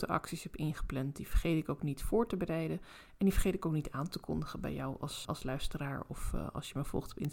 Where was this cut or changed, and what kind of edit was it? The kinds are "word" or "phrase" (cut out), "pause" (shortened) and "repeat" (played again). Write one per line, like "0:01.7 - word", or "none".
0:05.2 - word